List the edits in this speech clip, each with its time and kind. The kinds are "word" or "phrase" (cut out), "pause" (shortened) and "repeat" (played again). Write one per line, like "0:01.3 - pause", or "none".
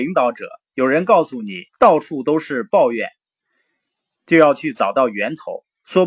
0:01.7 - pause